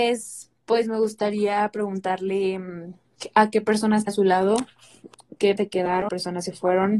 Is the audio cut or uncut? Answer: cut